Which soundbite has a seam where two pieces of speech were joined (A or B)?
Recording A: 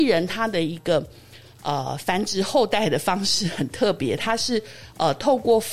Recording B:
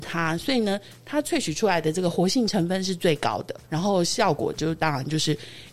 B